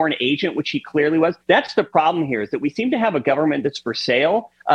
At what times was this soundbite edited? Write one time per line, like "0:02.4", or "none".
0:01.4